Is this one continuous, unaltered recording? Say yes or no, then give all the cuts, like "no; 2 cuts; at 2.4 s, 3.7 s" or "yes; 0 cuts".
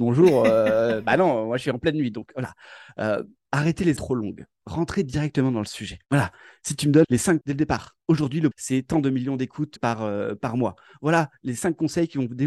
no; 9 cuts; at 3.4 s, 4.0 s, 4.5 s, 6.0 s, 7.0 s, 7.4 s, 8.0 s, 8.5 s, 9.8 s